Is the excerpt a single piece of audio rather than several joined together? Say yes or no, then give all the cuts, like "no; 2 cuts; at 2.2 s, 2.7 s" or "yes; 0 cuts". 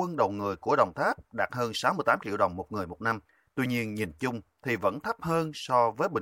yes; 0 cuts